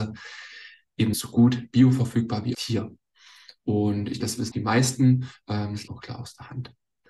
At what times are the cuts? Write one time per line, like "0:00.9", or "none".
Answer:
0:01.1
0:02.5
0:04.2
0:04.5
0:05.9